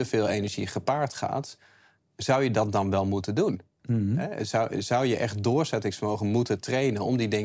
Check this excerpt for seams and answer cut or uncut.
uncut